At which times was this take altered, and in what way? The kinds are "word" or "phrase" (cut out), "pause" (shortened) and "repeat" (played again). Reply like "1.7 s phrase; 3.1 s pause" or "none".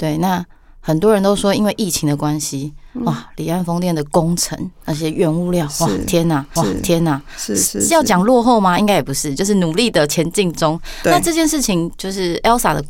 6.6 s repeat